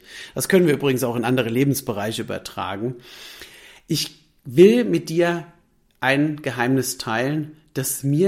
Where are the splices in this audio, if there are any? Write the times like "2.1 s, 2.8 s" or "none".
none